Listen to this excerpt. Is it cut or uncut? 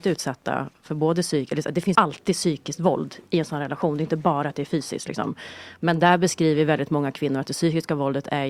cut